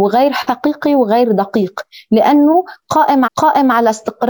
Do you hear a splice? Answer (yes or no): yes